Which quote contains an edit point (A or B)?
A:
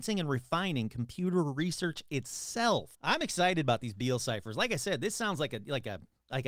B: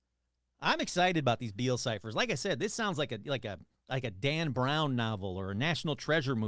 A